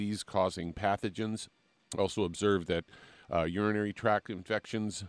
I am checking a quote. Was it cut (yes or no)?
yes